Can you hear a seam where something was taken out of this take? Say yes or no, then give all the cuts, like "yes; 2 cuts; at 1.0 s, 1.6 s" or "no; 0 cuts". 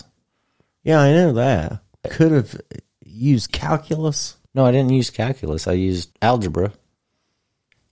yes; 3 cuts; at 2.0 s, 4.5 s, 6.1 s